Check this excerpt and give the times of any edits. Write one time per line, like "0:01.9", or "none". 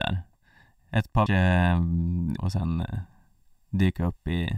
0:01.3
0:02.4